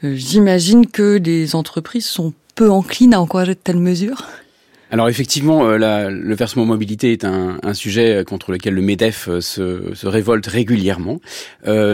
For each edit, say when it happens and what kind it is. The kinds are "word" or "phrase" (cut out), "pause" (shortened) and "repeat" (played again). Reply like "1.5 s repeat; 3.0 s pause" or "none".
none